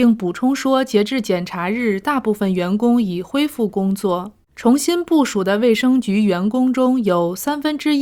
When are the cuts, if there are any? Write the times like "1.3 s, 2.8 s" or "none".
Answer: 4.4 s

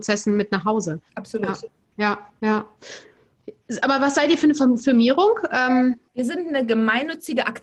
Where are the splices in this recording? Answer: 1.1 s, 6.1 s

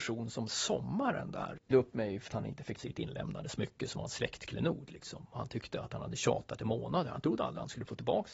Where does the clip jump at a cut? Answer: 1.7 s, 2.3 s, 2.8 s

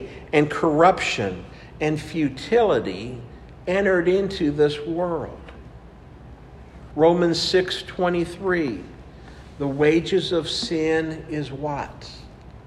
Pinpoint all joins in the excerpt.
none

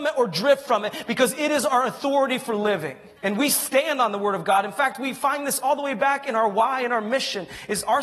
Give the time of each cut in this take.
3.2 s

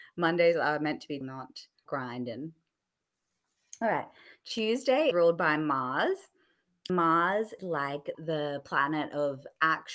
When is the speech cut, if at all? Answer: 1.2 s, 1.9 s, 5.1 s, 6.9 s, 7.6 s, 8.1 s

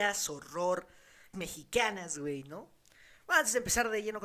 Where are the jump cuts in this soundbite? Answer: 1.3 s

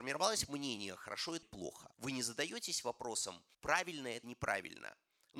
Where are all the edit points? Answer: 1.4 s, 1.9 s, 3.5 s, 4.2 s

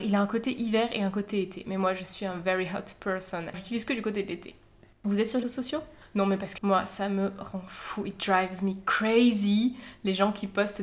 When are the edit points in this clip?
3.5 s, 5.4 s, 6.6 s

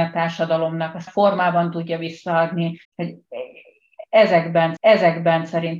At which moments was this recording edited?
1.1 s, 2.8 s, 4.8 s

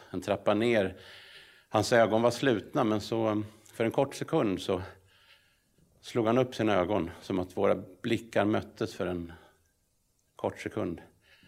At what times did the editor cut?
none

